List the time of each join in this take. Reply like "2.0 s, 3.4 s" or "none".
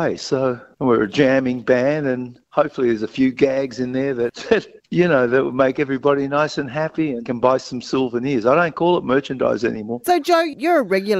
2.4 s, 4.8 s